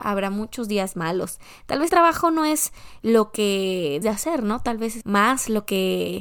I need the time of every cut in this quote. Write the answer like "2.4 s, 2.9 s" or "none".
1.9 s, 3.0 s, 4.0 s, 5.0 s